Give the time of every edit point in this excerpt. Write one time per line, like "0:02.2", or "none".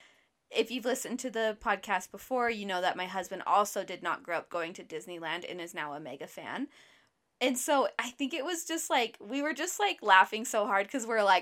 none